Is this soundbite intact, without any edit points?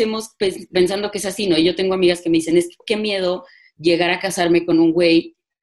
yes; 0 cuts

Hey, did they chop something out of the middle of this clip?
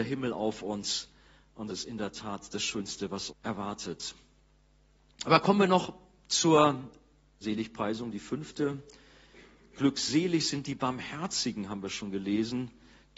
yes; 3 cuts; at 1.7 s, 3.3 s, 7.4 s

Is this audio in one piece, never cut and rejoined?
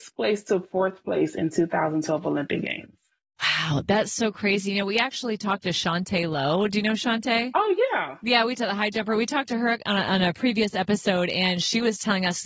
yes; 0 cuts

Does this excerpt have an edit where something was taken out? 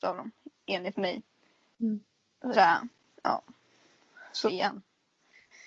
yes; 2 cuts; at 2.5 s, 4.5 s

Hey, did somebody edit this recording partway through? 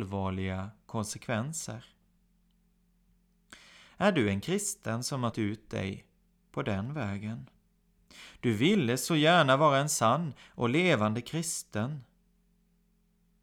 yes; 1 cut; at 5.3 s

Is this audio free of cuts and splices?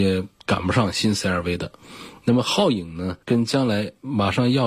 no; 1 cut; at 3.2 s

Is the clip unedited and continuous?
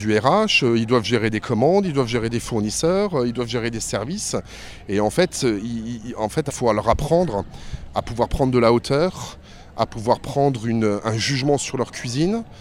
no; 2 cuts; at 6.0 s, 6.5 s

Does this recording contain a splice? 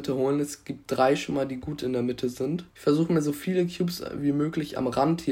yes; 1 cut; at 2.7 s

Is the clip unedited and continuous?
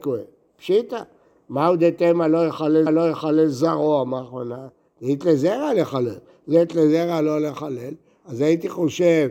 no; 1 cut; at 2.9 s

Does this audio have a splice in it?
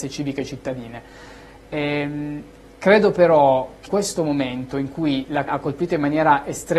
yes; 2 cuts; at 3.9 s, 5.5 s

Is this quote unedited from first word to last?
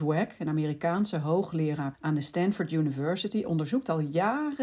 no; 1 cut; at 1.9 s

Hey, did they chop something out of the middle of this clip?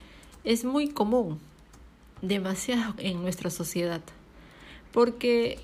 yes; 1 cut; at 3.0 s

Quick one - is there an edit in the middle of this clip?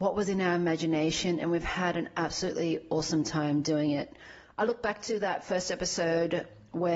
no; 0 cuts

